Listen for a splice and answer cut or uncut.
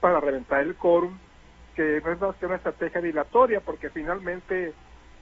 uncut